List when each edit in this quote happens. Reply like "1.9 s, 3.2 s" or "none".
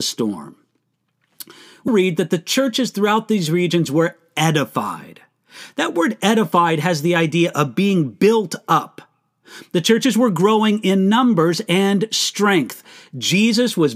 1.9 s

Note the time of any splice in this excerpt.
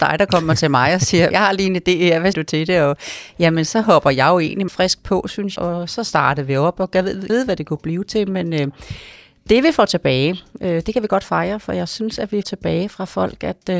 1.3 s, 2.3 s, 4.7 s, 5.6 s, 7.3 s, 12.4 s

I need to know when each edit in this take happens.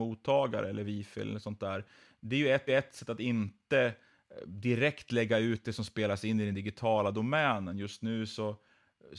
2.7 s

